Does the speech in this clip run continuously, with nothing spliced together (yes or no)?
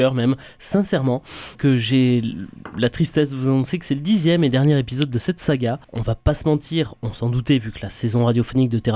no